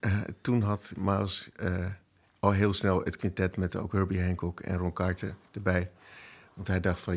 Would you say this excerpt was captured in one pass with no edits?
yes; 0 cuts

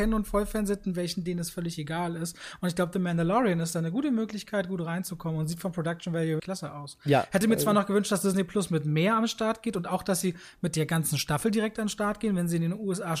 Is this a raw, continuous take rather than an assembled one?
no; 1 cut; at 6.4 s

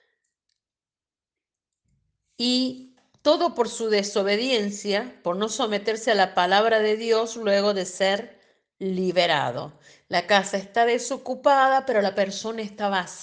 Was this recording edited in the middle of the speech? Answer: no; 0 cuts

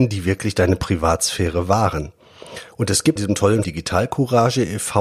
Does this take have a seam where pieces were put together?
yes; 2 cuts; at 3.2 s, 3.6 s

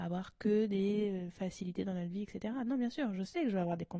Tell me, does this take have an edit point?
no; 0 cuts

